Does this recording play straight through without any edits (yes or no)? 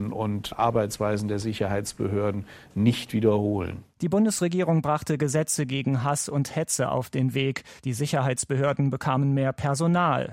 no